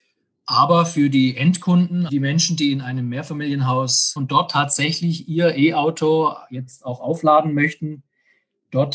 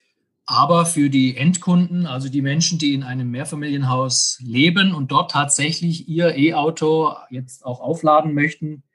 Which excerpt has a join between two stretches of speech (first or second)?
first